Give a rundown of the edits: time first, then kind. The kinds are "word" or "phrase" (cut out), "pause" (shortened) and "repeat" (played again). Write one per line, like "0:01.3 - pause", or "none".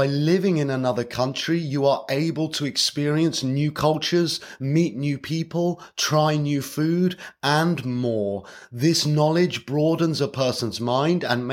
none